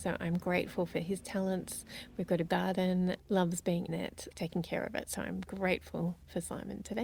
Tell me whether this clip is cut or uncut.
cut